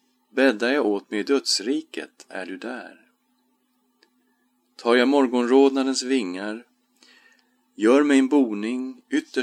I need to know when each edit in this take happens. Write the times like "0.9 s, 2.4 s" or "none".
none